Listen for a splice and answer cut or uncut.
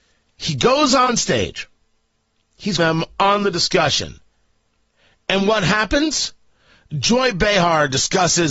cut